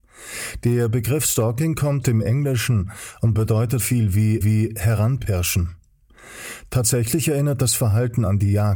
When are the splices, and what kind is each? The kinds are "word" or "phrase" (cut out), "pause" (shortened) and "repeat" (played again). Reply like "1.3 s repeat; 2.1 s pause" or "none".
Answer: 2.0 s word; 3.8 s word; 4.4 s repeat